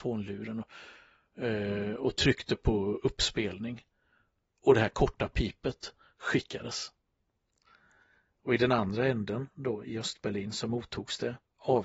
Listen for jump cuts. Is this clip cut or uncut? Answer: uncut